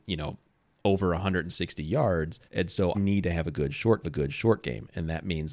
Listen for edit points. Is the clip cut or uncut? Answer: cut